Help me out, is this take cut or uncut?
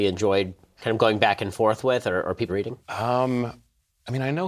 cut